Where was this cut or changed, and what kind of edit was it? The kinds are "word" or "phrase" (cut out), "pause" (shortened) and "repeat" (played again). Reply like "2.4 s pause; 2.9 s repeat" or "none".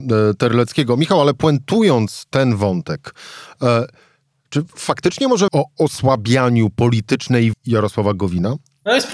5.5 s word; 7.5 s word